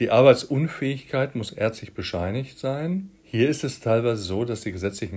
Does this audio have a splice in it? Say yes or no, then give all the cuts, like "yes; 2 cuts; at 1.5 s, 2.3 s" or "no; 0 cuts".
yes; 1 cut; at 3.2 s